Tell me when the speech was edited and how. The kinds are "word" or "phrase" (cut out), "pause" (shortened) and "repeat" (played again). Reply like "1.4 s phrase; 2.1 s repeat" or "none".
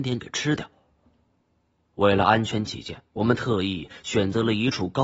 3.1 s pause